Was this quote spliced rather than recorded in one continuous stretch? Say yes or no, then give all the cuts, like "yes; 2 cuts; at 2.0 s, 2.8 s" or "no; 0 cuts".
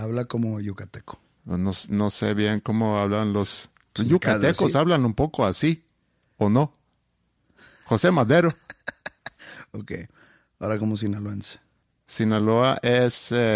no; 0 cuts